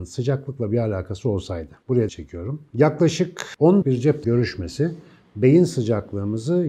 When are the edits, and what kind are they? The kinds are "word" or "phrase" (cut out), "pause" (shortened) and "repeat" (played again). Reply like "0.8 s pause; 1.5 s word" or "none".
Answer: 2.1 s word; 3.8 s word; 4.2 s word

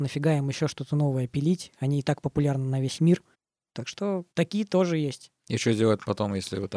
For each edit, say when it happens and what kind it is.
3.3 s pause; 4.3 s pause; 5.4 s pause

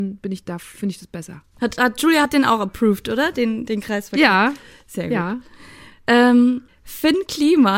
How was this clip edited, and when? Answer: none

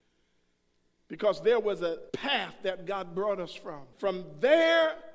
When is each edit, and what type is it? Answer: 2.1 s pause; 3.9 s pause

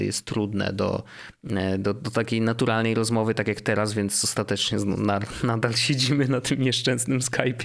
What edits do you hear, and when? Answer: none

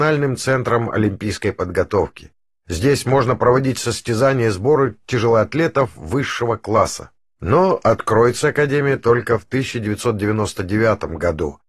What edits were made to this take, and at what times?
none

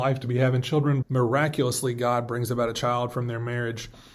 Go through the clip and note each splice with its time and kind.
1.0 s word

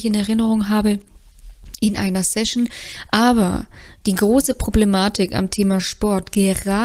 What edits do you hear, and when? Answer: none

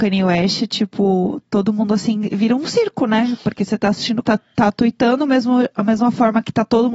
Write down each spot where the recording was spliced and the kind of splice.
4.2 s phrase

